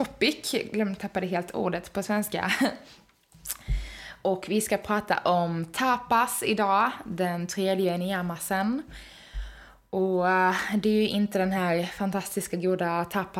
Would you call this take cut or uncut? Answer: uncut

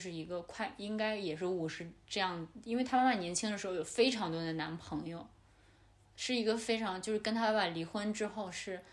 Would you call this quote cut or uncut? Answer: uncut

